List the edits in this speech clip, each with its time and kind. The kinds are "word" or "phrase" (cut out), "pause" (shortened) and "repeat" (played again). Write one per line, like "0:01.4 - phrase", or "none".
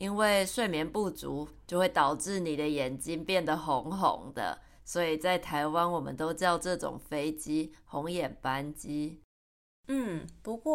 none